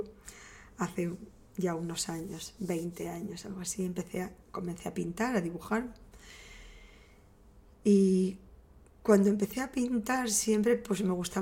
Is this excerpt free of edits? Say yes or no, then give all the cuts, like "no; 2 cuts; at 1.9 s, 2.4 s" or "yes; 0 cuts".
yes; 0 cuts